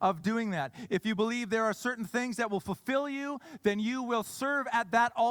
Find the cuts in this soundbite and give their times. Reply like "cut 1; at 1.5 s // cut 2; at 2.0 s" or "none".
none